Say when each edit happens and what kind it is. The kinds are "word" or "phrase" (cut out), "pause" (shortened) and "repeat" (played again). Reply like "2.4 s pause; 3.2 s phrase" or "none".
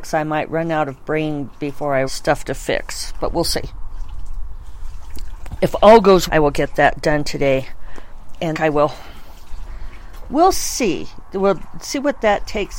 2.1 s phrase; 6.3 s word; 8.5 s phrase